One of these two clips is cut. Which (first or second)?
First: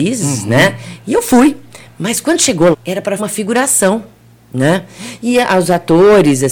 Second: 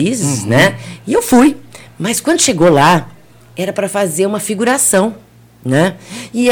first